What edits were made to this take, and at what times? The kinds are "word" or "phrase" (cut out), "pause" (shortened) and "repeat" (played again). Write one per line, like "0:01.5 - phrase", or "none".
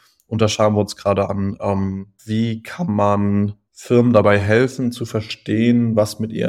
none